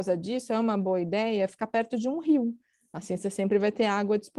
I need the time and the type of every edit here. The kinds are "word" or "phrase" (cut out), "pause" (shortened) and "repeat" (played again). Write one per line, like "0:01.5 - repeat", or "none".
none